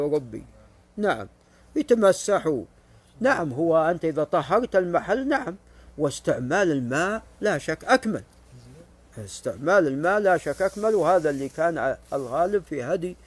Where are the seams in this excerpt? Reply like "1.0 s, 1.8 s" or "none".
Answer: none